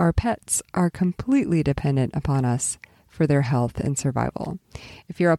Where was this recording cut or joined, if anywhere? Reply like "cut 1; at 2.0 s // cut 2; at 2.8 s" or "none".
none